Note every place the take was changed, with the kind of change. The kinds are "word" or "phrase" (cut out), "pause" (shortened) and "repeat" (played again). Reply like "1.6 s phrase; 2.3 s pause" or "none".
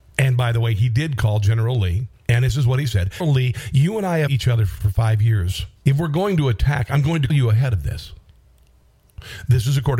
2.1 s pause; 3.2 s word; 4.3 s word; 4.8 s word; 5.8 s pause; 7.3 s word